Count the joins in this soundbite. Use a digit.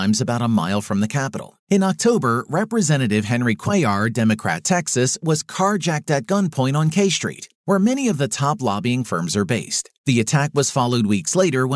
3